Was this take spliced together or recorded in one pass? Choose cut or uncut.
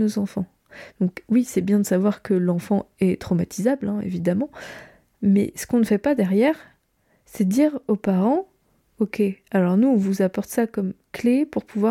uncut